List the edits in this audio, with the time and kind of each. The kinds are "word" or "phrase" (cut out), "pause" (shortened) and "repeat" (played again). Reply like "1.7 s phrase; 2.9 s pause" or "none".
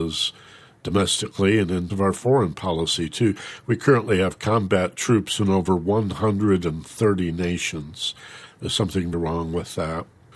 1.9 s word; 9.1 s word